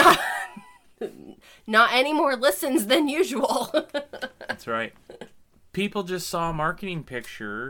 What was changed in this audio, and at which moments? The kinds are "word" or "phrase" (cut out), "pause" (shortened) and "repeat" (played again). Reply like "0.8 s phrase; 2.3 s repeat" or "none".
none